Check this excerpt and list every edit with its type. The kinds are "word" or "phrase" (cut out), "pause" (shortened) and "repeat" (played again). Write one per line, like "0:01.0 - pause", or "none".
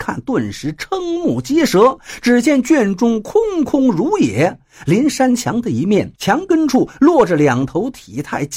0:06.2 - pause